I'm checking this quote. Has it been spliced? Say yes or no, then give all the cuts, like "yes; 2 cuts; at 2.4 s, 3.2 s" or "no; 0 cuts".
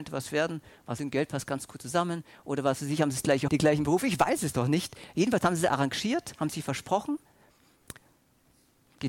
yes; 2 cuts; at 1.0 s, 3.5 s